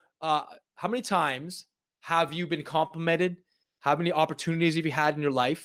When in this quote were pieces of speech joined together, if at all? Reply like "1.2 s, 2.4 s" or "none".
none